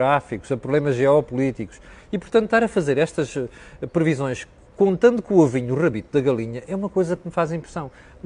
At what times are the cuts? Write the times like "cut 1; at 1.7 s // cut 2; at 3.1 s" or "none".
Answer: none